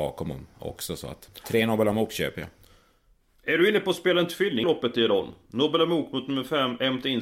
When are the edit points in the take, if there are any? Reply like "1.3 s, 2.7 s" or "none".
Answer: 1.4 s, 4.6 s

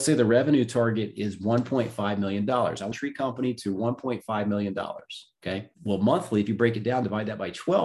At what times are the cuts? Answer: 2.9 s, 5.7 s

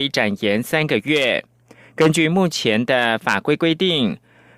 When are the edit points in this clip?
none

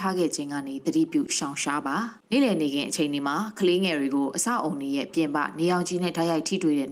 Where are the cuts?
2.2 s

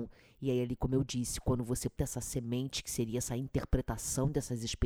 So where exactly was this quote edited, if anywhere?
2.0 s

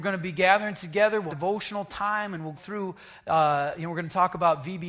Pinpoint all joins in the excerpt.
1.3 s, 2.6 s

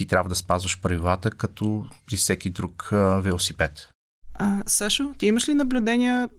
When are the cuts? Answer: none

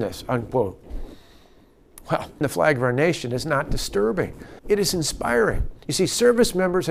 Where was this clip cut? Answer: 2.4 s, 4.6 s, 5.8 s

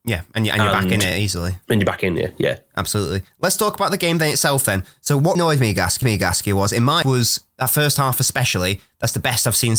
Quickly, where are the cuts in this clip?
5.4 s, 6.0 s, 7.0 s

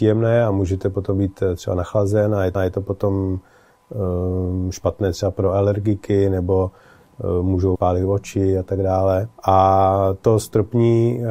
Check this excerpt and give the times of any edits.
2.5 s, 7.7 s, 9.4 s

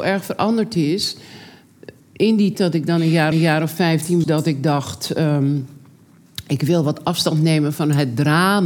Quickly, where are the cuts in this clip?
2.0 s, 2.5 s, 3.3 s, 4.2 s

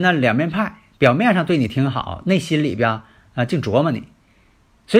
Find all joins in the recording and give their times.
none

